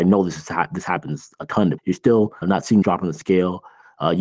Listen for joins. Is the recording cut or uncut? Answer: cut